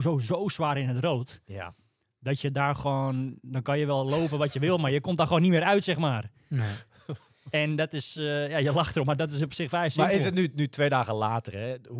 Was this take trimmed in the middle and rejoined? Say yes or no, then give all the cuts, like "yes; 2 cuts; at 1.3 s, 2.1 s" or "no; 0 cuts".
no; 0 cuts